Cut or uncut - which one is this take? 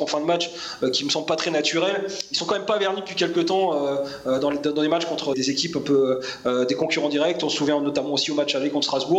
cut